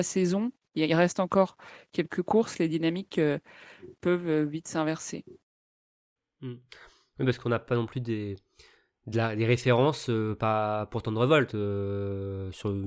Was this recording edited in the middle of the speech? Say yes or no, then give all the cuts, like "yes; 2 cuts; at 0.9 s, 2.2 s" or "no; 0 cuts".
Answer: no; 0 cuts